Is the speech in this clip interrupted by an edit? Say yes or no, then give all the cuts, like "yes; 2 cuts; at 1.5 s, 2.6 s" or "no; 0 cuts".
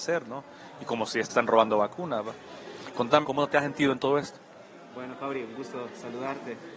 yes; 2 cuts; at 1.3 s, 3.2 s